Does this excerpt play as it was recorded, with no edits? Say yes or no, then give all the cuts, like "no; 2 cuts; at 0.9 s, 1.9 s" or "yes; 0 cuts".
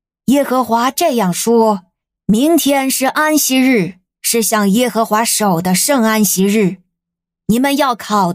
yes; 0 cuts